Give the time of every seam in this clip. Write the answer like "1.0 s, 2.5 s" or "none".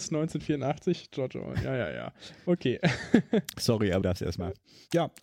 4.0 s